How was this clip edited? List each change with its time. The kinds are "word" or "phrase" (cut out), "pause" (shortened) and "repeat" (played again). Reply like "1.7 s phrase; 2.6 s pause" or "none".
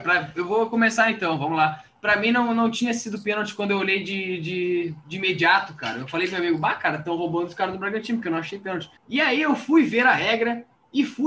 9.0 s pause